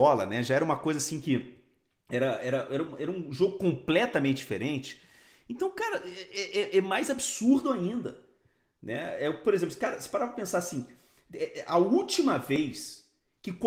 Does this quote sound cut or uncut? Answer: uncut